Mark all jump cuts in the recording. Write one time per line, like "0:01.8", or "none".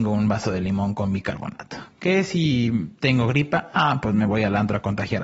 none